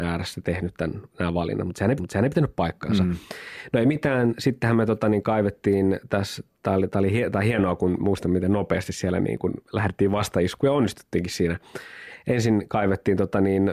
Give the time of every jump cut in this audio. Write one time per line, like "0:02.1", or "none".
0:02.0
0:08.0
0:09.6